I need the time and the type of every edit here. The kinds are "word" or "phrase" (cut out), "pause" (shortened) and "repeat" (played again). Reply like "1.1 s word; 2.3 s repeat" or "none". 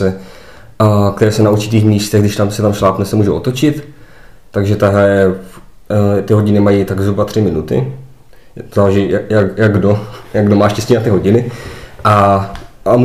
none